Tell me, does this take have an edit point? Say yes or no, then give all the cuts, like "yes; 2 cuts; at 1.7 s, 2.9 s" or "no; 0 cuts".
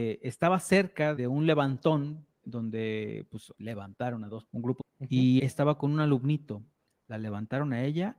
yes; 6 cuts; at 1.2 s, 2.4 s, 3.5 s, 4.5 s, 4.8 s, 5.4 s